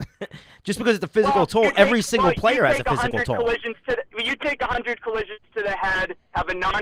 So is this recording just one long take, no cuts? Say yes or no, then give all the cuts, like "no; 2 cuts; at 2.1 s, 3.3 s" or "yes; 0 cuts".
no; 1 cut; at 4.1 s